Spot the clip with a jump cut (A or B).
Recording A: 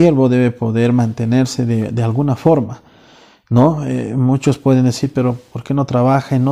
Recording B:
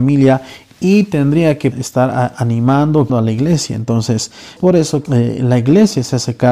B